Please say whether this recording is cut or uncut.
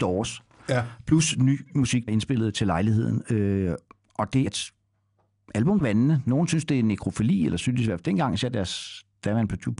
cut